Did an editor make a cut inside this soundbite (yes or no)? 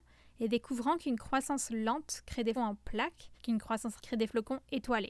yes